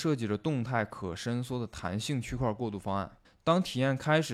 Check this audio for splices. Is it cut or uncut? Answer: cut